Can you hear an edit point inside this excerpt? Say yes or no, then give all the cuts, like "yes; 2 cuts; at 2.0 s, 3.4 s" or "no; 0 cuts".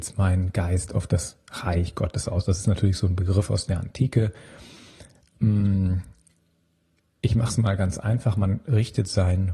no; 0 cuts